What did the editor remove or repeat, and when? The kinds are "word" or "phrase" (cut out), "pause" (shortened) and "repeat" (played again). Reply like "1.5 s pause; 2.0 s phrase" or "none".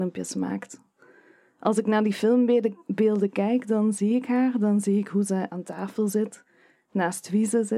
none